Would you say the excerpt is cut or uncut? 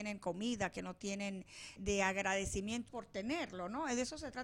cut